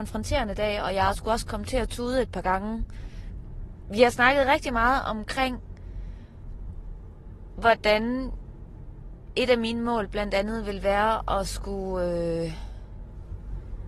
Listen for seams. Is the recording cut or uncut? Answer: uncut